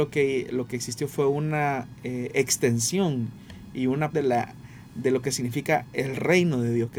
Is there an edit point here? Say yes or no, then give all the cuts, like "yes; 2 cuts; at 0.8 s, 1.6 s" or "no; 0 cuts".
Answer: yes; 1 cut; at 4.1 s